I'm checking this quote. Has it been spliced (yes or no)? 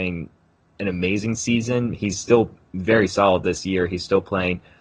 no